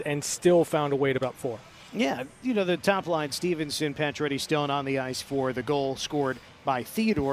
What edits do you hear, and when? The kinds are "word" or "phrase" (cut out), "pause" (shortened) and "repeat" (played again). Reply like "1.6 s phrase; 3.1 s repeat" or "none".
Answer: 1.2 s word